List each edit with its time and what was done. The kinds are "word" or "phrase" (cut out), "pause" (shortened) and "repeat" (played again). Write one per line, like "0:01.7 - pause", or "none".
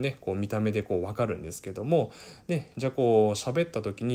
none